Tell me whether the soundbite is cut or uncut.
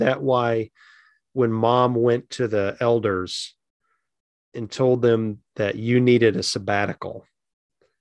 uncut